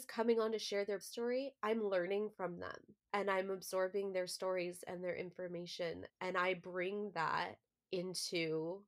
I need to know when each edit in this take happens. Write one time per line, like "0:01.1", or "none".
0:01.0
0:03.0
0:06.1
0:07.7